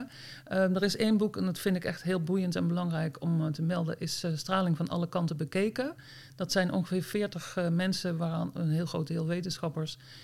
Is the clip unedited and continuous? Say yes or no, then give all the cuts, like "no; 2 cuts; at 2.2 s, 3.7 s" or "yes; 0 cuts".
yes; 0 cuts